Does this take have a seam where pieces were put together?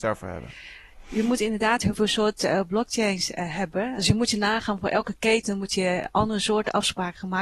no; 0 cuts

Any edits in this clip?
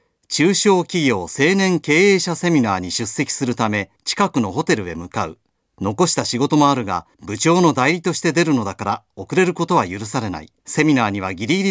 yes; 4 cuts; at 4.0 s, 5.6 s, 7.1 s, 10.6 s

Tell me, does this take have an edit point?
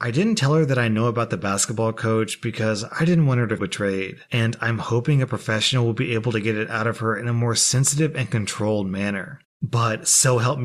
yes; 1 cut; at 3.6 s

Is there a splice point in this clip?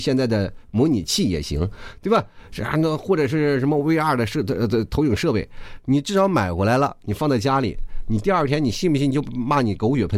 no; 0 cuts

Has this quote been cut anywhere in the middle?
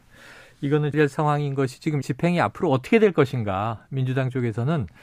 yes; 2 cuts; at 0.9 s, 2.0 s

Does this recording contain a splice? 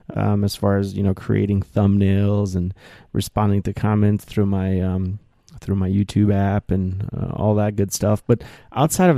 no; 0 cuts

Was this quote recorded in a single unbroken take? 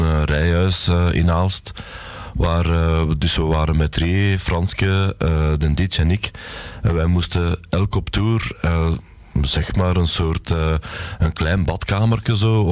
no; 1 cut; at 9.7 s

